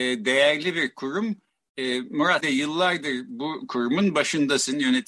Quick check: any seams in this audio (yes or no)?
yes